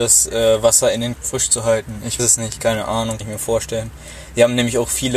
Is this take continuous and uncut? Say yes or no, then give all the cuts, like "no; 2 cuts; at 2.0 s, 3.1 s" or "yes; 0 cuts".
no; 3 cuts; at 1.2 s, 2.2 s, 3.2 s